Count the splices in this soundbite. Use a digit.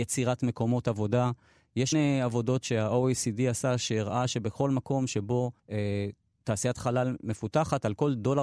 2